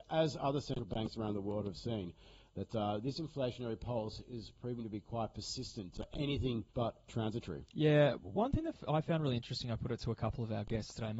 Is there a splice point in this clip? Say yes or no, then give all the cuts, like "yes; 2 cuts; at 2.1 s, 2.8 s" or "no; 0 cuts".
yes; 2 cuts; at 6.7 s, 7.7 s